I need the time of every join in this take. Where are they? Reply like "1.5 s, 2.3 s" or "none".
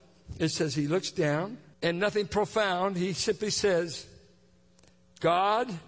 1.7 s